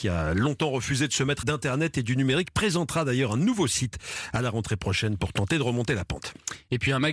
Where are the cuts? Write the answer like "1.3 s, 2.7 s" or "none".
1.4 s